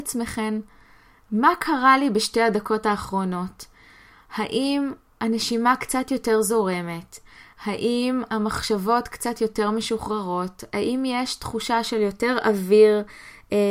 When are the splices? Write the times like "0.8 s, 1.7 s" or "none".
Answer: none